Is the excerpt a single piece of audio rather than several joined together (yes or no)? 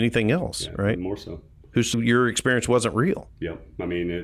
no